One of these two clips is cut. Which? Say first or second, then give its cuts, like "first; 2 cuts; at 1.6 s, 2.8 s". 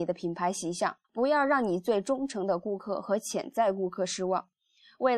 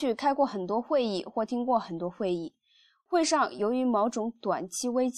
first; 1 cut; at 1.0 s